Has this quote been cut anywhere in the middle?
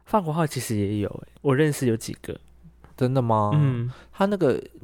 yes; 1 cut; at 1.4 s

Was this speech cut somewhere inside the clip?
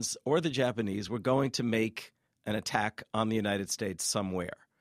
no; 0 cuts

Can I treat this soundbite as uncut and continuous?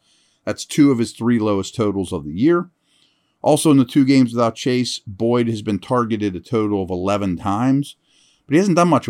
yes; 0 cuts

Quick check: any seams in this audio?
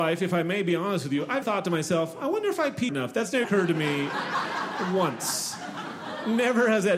yes; 3 cuts; at 1.4 s, 2.9 s, 3.4 s

